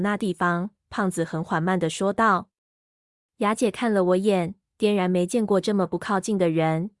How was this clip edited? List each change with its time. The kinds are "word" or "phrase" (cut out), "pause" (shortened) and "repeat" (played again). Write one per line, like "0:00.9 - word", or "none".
none